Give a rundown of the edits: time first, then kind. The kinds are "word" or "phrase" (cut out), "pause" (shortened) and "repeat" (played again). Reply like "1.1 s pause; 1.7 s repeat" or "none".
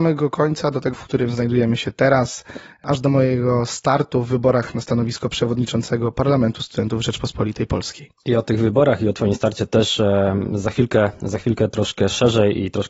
0.9 s word